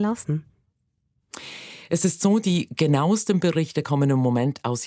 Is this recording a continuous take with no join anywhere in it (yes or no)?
yes